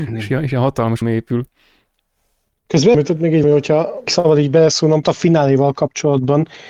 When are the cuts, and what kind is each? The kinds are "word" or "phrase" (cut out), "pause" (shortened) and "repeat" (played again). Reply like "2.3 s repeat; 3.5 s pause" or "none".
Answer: 1.0 s word; 2.9 s word; 3.4 s word; 4.1 s word; 5.0 s word